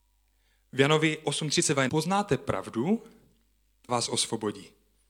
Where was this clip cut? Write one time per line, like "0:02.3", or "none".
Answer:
0:01.9
0:03.9